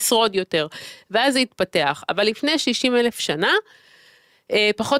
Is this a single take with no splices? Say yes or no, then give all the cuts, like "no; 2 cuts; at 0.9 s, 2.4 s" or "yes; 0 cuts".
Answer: yes; 0 cuts